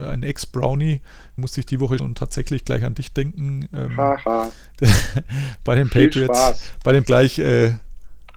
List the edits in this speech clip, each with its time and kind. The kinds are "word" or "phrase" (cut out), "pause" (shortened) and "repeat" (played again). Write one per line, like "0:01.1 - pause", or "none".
0:01.4 - word
0:02.0 - word
0:07.1 - word